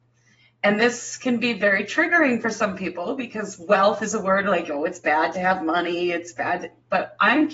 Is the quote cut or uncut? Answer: uncut